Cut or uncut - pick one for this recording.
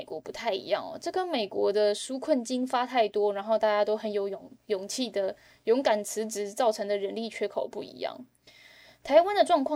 uncut